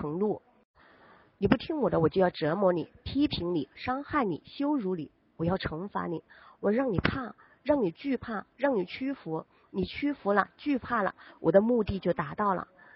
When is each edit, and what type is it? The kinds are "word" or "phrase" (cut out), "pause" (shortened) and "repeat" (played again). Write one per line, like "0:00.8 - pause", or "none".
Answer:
none